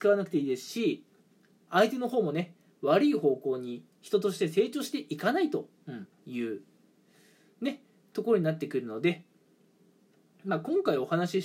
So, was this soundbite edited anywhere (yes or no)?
no